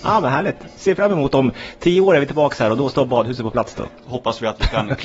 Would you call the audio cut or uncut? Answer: cut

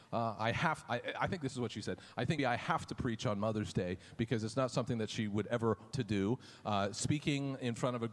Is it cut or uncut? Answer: cut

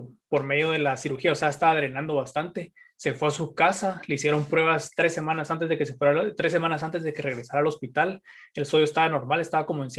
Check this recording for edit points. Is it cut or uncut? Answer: uncut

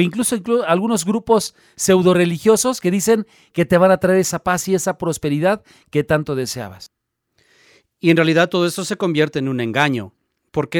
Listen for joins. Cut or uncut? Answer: uncut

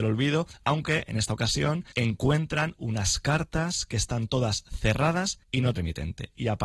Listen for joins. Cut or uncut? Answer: cut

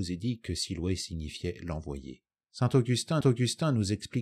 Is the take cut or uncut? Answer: cut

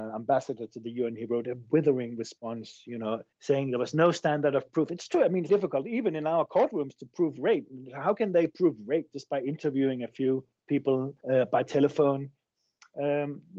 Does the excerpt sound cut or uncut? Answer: cut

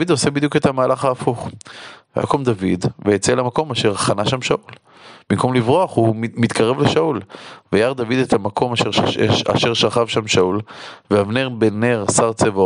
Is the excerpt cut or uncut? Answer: uncut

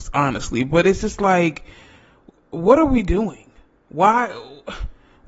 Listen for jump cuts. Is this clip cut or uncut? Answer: uncut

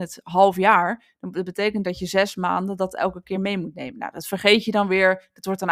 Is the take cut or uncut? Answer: uncut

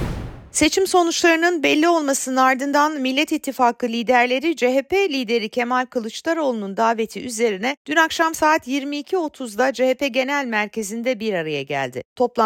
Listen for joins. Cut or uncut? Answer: uncut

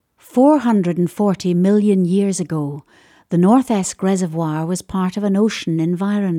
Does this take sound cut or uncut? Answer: uncut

